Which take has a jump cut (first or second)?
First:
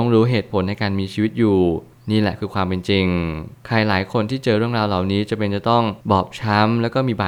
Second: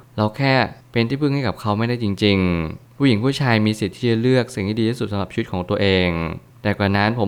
first